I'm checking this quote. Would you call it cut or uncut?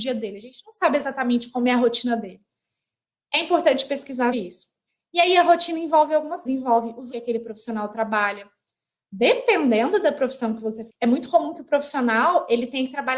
cut